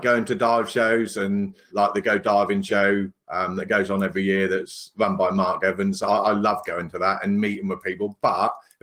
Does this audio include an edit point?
yes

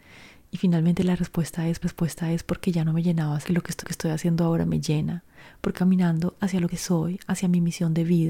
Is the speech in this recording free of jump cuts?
no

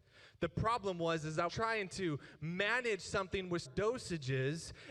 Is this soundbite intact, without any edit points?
no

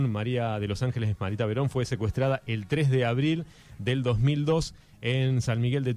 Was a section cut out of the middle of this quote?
no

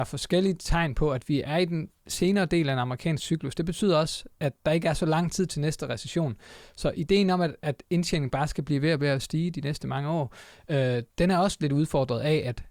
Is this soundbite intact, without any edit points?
no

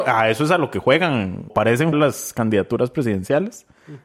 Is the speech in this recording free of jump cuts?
no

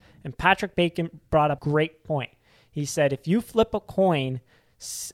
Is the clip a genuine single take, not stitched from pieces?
no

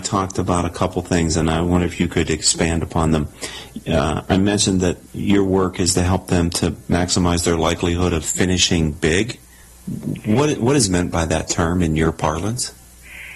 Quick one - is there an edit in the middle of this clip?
yes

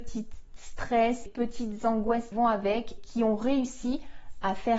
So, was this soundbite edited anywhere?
yes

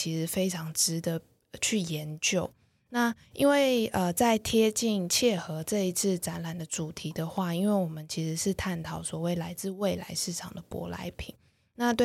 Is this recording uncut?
yes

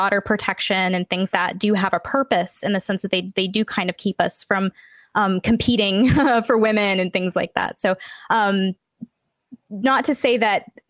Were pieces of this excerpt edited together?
yes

